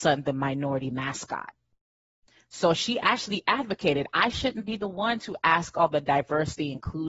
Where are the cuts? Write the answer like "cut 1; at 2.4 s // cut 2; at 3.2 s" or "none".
none